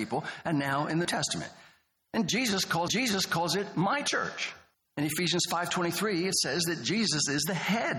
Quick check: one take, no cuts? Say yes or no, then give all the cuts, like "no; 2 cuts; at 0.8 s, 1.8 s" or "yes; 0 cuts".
no; 3 cuts; at 1.0 s, 2.9 s, 4.7 s